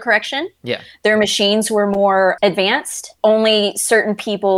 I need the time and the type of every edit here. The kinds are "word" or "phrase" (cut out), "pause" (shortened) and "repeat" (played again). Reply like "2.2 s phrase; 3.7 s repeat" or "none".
none